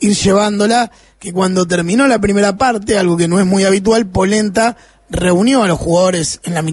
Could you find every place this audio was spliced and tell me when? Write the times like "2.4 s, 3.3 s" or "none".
none